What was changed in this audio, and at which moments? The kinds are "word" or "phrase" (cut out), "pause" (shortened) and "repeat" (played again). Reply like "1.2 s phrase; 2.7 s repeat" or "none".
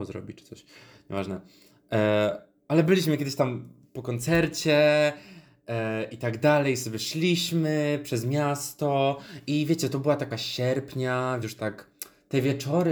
10.3 s word; 11.4 s word